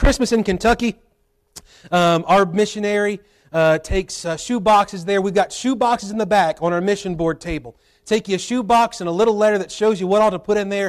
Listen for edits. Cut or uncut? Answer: uncut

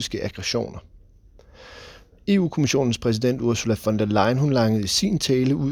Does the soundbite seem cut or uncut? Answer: uncut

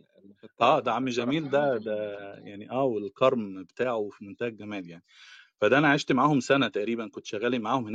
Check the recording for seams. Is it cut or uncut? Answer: uncut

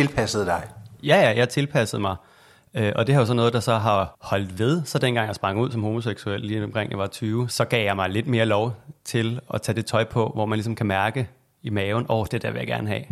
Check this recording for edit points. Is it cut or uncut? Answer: cut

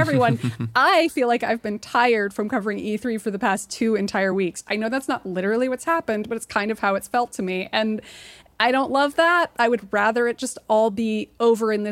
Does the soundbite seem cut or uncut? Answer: uncut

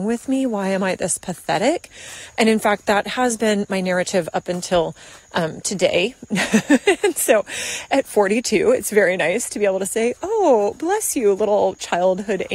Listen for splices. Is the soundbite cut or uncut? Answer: uncut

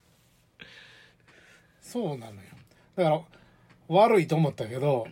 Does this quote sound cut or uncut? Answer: uncut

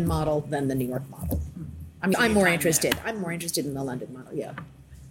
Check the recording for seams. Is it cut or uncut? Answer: cut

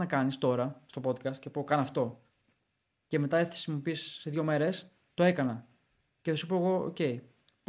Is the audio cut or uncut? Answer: uncut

